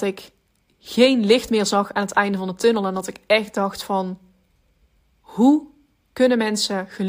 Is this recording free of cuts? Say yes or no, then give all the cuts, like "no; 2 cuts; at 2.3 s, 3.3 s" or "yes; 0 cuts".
yes; 0 cuts